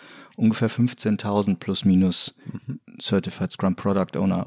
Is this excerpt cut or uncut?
uncut